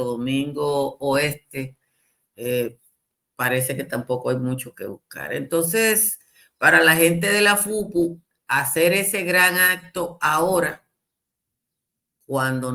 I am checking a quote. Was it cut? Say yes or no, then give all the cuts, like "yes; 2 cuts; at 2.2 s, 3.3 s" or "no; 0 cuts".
no; 0 cuts